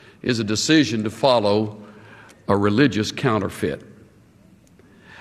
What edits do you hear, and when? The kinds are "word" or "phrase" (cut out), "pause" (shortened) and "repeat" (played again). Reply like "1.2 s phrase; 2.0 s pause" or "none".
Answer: none